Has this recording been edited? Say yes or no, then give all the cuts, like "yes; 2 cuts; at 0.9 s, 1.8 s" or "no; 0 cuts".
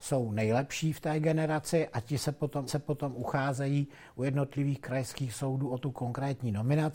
yes; 1 cut; at 2.7 s